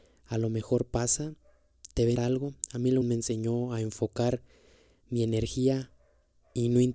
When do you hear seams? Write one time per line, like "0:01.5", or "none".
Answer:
0:02.1
0:03.0